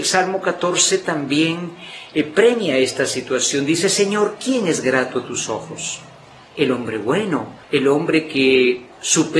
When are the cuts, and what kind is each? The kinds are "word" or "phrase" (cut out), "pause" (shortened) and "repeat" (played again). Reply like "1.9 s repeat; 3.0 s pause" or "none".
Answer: 7.6 s pause